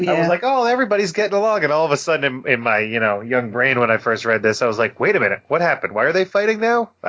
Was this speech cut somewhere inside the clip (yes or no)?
no